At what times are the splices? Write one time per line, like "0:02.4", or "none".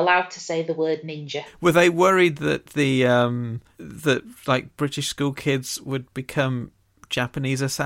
none